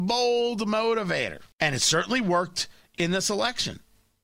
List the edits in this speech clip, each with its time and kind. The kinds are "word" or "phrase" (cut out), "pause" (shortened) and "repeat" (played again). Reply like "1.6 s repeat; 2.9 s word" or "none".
1.5 s pause